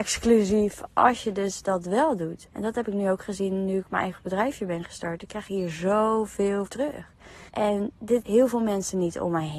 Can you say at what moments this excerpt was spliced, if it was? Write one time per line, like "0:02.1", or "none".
0:02.5
0:06.7
0:07.5
0:08.2